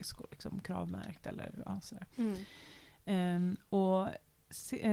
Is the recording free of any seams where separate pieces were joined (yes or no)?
yes